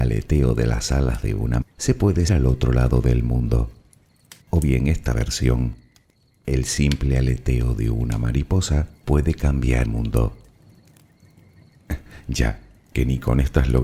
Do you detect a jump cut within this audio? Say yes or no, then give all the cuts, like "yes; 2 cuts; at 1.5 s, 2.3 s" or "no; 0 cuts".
yes; 6 cuts; at 1.6 s, 2.3 s, 4.4 s, 5.1 s, 9.0 s, 9.9 s